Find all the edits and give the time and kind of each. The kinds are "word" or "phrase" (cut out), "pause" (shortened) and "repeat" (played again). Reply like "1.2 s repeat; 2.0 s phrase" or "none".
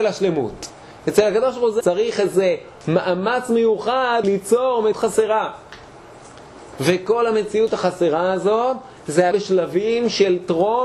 1.8 s word; 4.2 s word; 4.9 s word; 9.3 s word